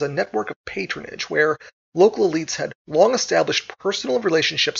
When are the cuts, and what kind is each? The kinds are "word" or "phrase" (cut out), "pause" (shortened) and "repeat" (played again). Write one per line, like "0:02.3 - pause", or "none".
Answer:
none